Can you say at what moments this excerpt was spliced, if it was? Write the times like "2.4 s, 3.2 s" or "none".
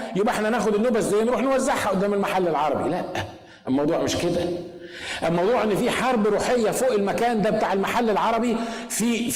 none